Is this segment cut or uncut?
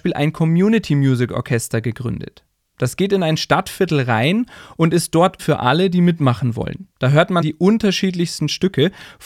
cut